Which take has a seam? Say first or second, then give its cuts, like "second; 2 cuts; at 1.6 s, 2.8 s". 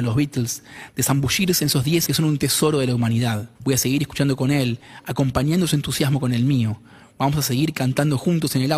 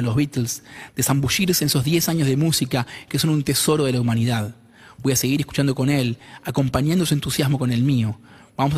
first; 2 cuts; at 2.1 s, 3.6 s